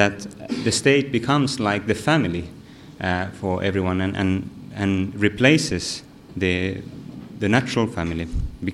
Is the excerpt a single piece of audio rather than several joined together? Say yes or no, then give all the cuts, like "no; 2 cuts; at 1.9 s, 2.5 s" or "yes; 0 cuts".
yes; 0 cuts